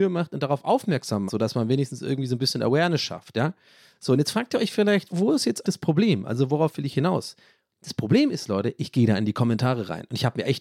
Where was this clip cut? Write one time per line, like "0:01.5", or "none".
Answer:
0:01.3
0:05.1
0:05.6